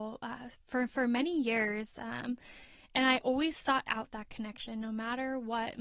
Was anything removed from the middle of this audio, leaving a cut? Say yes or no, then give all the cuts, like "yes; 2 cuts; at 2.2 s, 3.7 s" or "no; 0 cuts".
no; 0 cuts